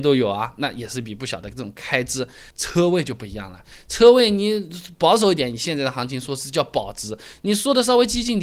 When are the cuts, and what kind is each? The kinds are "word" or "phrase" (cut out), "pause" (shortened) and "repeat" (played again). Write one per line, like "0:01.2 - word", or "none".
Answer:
0:02.5 - pause